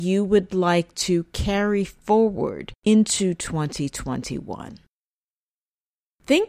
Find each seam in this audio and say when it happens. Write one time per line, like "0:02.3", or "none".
0:02.8